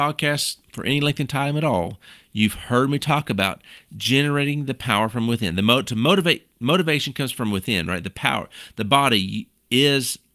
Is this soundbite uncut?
yes; 0 cuts

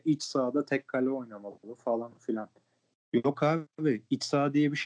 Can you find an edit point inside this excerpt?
no; 0 cuts

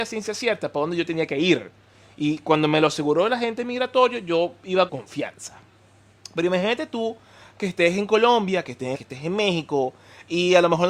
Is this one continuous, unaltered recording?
no; 2 cuts; at 4.9 s, 8.9 s

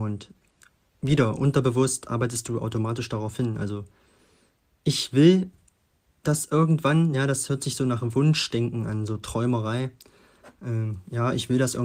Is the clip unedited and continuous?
yes; 0 cuts

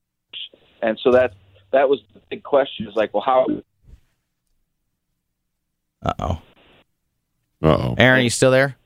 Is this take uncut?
yes; 0 cuts

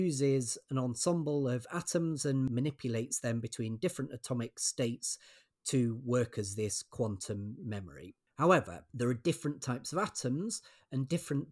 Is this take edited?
no; 0 cuts

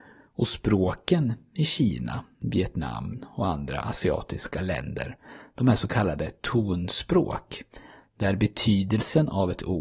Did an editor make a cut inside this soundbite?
no; 0 cuts

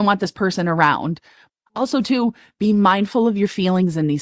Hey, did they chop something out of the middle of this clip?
no; 0 cuts

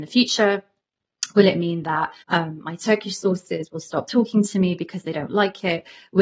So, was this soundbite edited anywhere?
yes; 1 cut; at 2.2 s

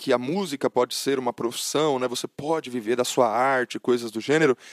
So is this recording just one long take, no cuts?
yes; 0 cuts

